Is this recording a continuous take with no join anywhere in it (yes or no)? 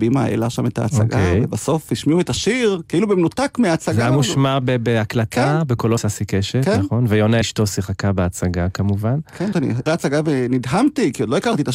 no